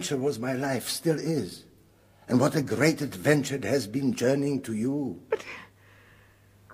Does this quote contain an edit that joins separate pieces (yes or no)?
no